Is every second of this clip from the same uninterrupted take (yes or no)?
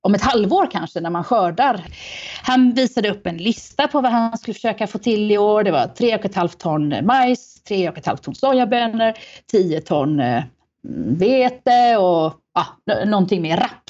yes